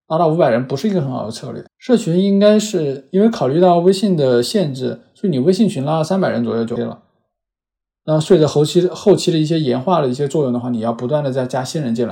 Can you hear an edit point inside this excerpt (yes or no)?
yes